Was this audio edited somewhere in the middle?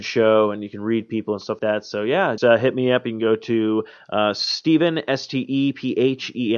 yes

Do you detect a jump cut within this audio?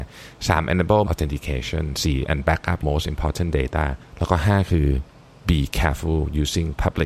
yes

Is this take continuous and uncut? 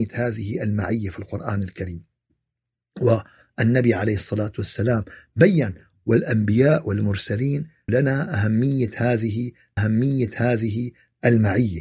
no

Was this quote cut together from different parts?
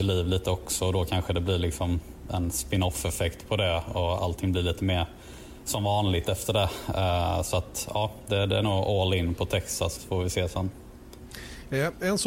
yes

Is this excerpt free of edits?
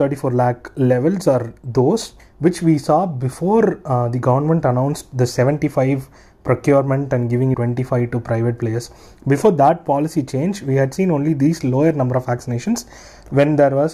no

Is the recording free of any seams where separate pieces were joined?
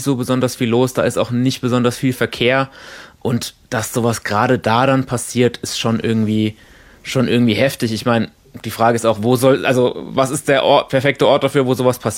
yes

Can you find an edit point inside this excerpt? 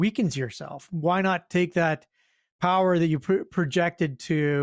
no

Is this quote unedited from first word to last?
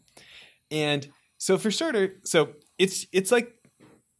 yes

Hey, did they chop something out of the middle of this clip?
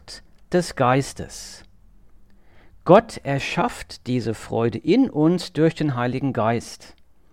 no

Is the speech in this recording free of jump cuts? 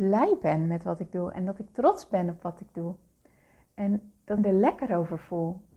no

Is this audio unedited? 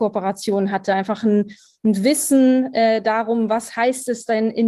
yes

